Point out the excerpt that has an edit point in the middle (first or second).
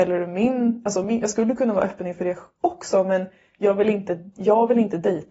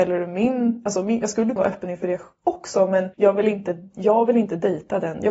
second